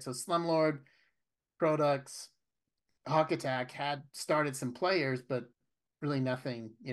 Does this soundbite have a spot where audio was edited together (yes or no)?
yes